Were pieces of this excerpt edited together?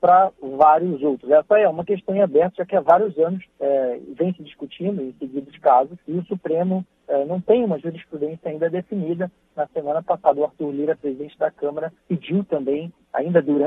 yes; 3 cuts; at 3.5 s, 6.0 s, 12.0 s

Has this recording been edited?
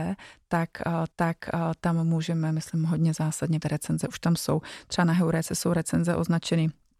yes; 2 cuts; at 1.1 s, 3.6 s

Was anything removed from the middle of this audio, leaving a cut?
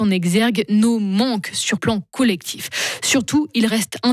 yes; 1 cut; at 1.8 s

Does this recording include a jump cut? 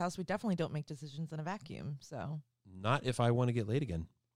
no; 0 cuts

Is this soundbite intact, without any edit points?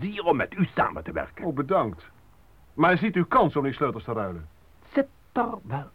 yes; 0 cuts

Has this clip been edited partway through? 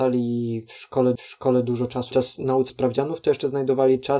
yes; 3 cuts; at 1.2 s, 2.1 s, 2.7 s

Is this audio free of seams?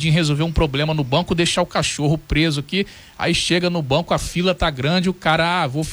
yes; 0 cuts

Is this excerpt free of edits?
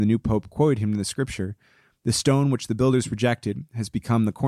yes; 0 cuts

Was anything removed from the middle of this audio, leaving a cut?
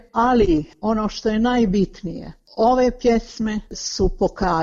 no; 0 cuts

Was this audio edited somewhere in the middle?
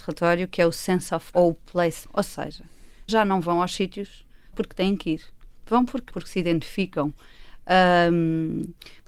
yes; 5 cuts; at 1.3 s, 2.0 s, 3.1 s, 4.5 s, 6.1 s

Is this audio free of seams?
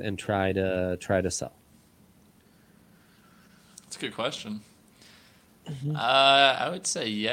yes; 0 cuts

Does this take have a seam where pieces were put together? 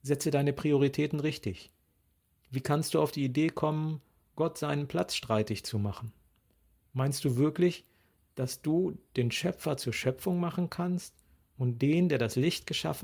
no; 0 cuts

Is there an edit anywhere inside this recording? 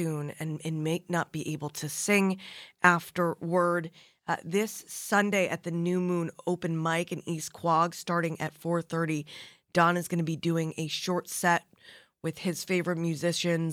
no; 0 cuts

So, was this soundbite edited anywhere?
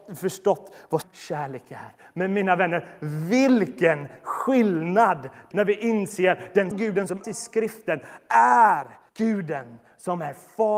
yes; 5 cuts; at 1.0 s, 5.5 s, 6.7 s, 7.2 s, 9.1 s

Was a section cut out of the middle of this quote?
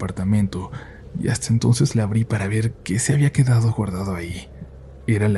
no; 0 cuts

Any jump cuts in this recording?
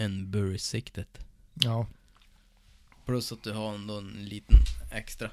no; 0 cuts

